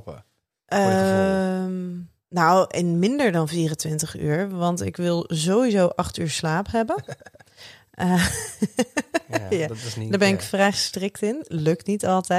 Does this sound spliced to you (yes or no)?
no